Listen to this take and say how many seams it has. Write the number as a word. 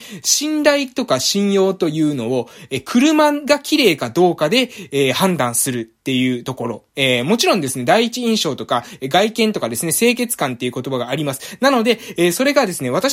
one